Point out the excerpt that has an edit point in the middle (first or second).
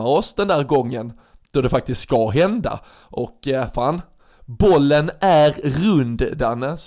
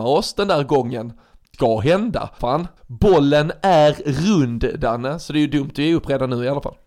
second